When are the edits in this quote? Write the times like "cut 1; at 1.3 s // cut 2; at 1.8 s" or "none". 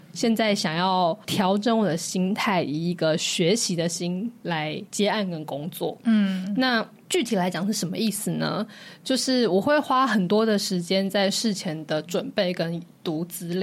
none